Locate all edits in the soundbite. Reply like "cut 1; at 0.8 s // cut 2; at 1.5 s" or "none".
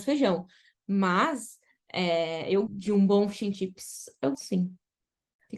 cut 1; at 2.7 s // cut 2; at 4.3 s